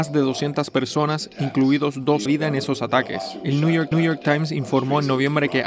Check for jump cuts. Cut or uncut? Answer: cut